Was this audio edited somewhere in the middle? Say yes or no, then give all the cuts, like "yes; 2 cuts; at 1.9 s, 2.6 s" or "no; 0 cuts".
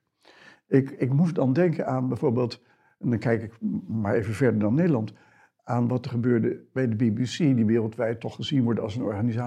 no; 0 cuts